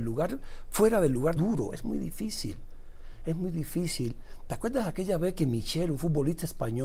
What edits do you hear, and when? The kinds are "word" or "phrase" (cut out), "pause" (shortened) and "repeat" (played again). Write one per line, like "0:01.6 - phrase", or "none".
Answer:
0:01.4 - phrase